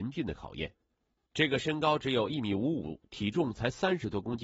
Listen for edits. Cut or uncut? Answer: uncut